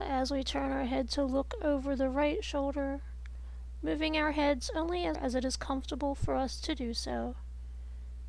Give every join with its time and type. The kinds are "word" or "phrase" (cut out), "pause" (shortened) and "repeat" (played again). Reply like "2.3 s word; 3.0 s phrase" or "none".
5.1 s word